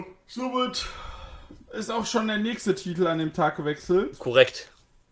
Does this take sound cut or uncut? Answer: uncut